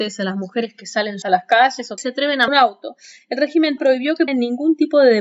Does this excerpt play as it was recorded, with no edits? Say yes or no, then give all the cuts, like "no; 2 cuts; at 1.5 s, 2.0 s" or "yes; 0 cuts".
no; 5 cuts; at 1.2 s, 2.0 s, 2.5 s, 3.8 s, 4.3 s